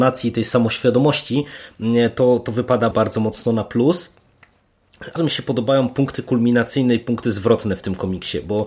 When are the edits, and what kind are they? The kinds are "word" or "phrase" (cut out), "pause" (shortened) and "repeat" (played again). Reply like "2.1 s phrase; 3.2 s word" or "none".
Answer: 2.9 s word; 5.2 s phrase

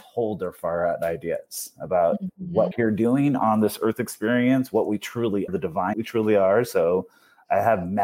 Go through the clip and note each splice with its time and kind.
2.7 s word; 5.5 s word; 5.9 s word

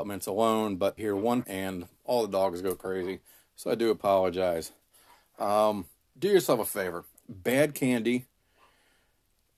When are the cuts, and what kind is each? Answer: 1.0 s word; 1.4 s word; 6.1 s word; 7.1 s word

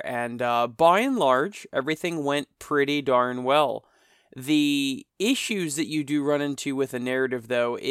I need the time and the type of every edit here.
5.1 s pause

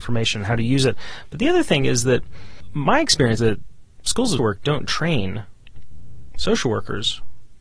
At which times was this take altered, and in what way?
3.4 s word; 4.4 s word

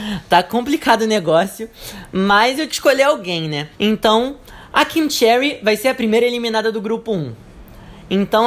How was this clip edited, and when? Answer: 2.7 s word; 3.7 s pause

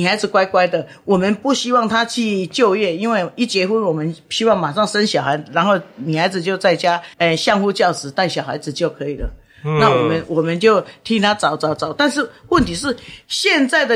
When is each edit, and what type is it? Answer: 7.1 s pause

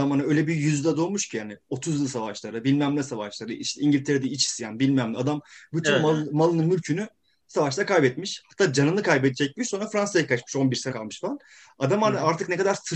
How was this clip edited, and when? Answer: 10.9 s word

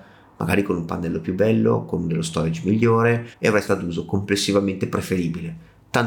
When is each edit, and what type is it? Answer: 3.3 s pause; 3.7 s word

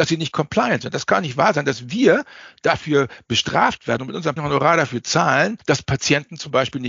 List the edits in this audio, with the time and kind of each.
4.4 s word; 5.6 s pause

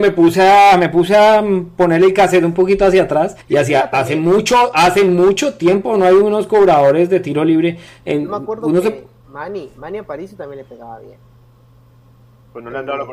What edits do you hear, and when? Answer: 3.4 s pause; 9.2 s pause

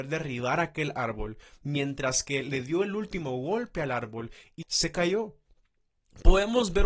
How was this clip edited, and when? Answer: 4.6 s phrase

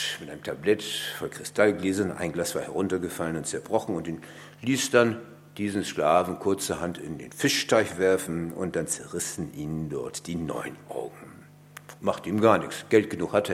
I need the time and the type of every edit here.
12.0 s pause

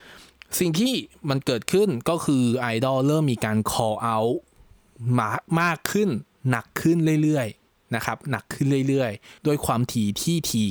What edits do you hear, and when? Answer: 7.6 s pause; 9.4 s pause

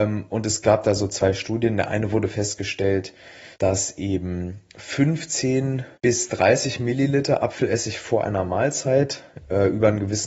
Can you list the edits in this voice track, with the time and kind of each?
3.5 s pause; 5.9 s pause

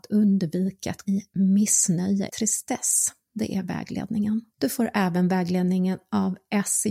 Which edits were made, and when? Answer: 1.0 s phrase; 2.3 s word; 4.5 s pause

